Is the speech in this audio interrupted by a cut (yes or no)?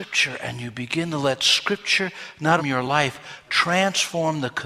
yes